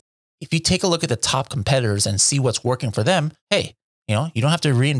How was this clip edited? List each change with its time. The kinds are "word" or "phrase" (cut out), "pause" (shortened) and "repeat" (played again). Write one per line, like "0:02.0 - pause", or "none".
0:03.4 - pause